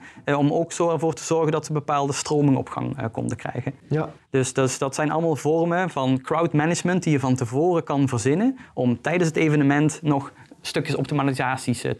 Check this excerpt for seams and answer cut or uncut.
uncut